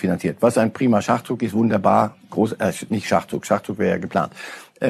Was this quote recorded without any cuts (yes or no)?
yes